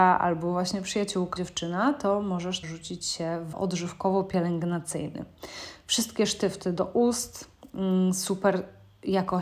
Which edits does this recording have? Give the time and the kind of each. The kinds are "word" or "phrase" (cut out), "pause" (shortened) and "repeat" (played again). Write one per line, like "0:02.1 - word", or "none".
0:01.4 - word
0:02.6 - word
0:03.5 - word

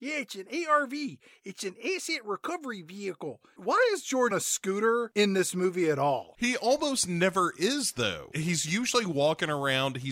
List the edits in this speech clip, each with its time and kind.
0:04.3 - word

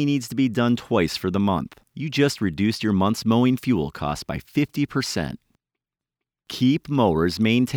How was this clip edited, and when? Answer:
0:01.8 - pause

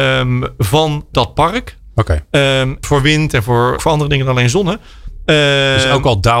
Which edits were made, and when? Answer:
0:01.1 - word
0:02.8 - word
0:03.8 - word

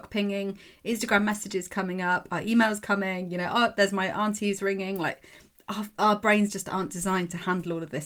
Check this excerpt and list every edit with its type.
none

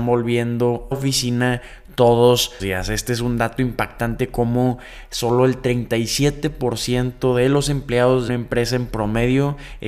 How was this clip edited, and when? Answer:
0:00.9 - phrase
0:02.6 - word
0:08.3 - word

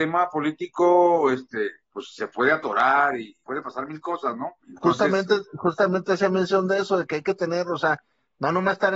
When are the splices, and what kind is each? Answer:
0:01.8 - pause
0:03.4 - pause
0:04.6 - pause

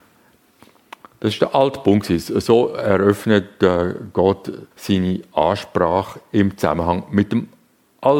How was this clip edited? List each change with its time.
0:04.7 - pause

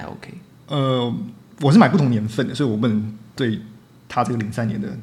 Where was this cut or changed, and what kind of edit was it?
0:03.3 - pause

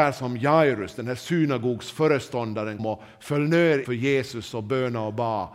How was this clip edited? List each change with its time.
0:02.8 - word
0:03.8 - word

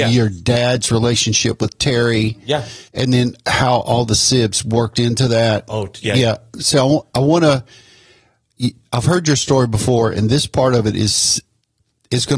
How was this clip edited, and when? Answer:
0:02.9 - pause

